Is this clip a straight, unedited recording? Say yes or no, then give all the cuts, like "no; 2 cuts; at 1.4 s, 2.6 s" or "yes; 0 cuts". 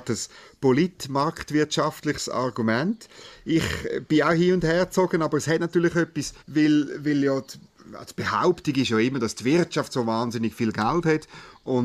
no; 1 cut; at 6.4 s